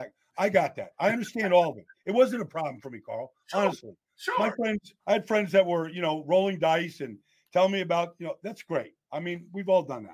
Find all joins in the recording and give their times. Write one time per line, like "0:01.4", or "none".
0:05.0